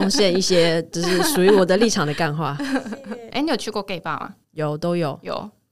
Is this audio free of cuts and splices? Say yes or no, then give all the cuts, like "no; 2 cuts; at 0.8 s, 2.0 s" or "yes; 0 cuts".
no; 1 cut; at 4.4 s